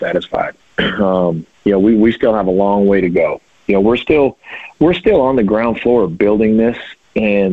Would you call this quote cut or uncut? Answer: uncut